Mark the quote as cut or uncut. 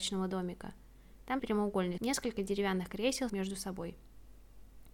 cut